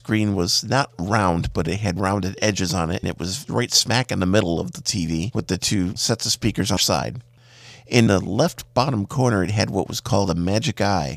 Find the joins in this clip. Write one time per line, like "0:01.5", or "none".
0:02.0
0:03.0
0:06.0
0:06.8
0:08.1